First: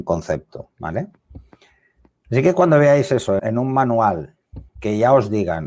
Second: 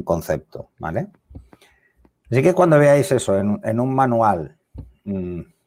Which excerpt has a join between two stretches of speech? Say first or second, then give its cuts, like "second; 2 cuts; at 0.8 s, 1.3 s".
first; 2 cuts; at 3.4 s, 4.7 s